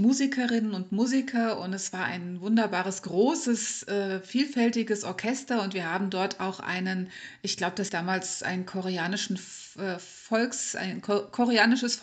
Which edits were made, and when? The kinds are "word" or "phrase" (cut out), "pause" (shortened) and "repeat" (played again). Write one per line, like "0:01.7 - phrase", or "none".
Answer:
0:07.9 - word